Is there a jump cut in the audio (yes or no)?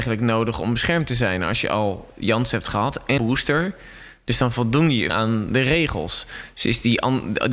yes